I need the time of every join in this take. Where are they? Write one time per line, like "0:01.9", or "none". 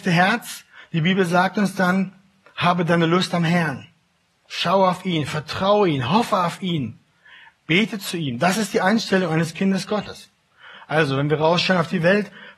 none